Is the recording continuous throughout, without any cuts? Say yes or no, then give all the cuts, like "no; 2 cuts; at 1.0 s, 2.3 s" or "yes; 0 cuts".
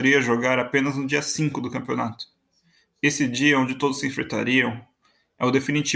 yes; 0 cuts